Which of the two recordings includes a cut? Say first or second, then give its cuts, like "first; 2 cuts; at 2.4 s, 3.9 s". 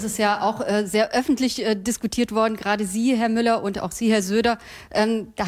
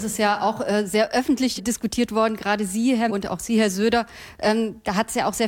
second; 2 cuts; at 1.6 s, 3.1 s